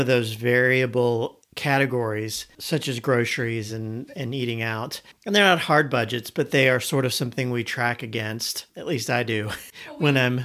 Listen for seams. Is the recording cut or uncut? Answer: uncut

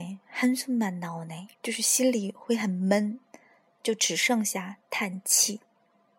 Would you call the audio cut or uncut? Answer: cut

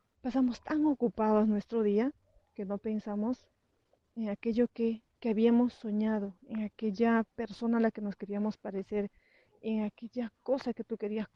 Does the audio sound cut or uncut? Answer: uncut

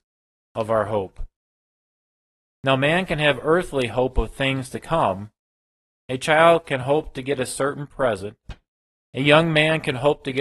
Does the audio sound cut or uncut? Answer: uncut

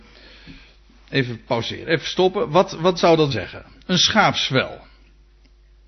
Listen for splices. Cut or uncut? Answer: cut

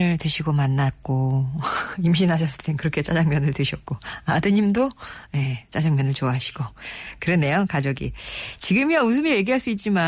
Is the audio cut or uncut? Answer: uncut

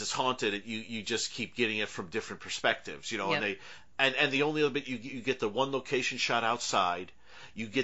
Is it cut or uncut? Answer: uncut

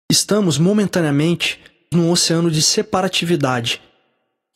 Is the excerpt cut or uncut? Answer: cut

